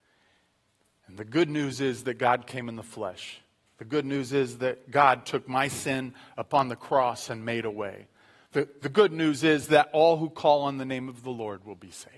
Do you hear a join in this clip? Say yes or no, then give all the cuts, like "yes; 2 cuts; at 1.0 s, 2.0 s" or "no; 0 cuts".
no; 0 cuts